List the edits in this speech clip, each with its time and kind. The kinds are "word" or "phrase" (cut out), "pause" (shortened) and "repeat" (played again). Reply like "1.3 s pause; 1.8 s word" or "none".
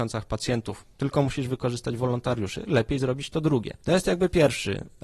none